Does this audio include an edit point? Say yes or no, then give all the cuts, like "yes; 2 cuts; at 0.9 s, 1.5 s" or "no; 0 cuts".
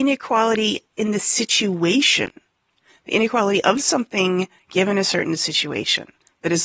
no; 0 cuts